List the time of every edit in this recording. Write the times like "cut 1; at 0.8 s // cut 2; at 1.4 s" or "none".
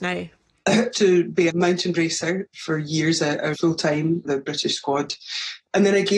cut 1; at 0.9 s // cut 2; at 1.5 s // cut 3; at 1.9 s // cut 4; at 3.5 s // cut 5; at 4.2 s